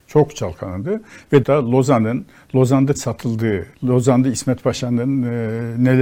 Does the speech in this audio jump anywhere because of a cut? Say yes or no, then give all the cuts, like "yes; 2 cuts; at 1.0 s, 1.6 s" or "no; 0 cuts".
yes; 3 cuts; at 1.4 s, 2.9 s, 3.7 s